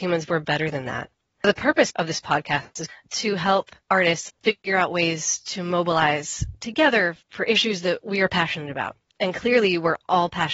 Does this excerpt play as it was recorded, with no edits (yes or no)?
no